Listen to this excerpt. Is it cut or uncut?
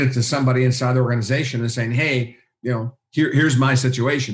uncut